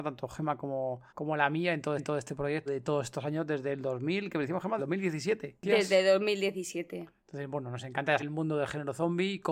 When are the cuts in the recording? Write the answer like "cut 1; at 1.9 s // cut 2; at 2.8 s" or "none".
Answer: cut 1; at 1.1 s // cut 2; at 2.0 s // cut 3; at 2.7 s // cut 4; at 4.8 s // cut 5; at 7.2 s // cut 6; at 8.2 s